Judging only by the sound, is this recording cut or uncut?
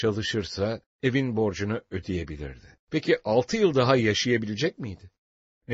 cut